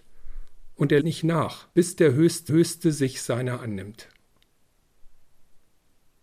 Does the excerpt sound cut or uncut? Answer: cut